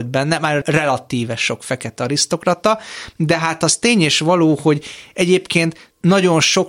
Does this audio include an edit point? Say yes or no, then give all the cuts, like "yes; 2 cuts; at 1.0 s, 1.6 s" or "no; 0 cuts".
no; 0 cuts